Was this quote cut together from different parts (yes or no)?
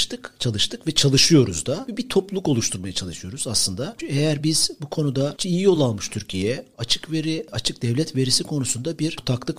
no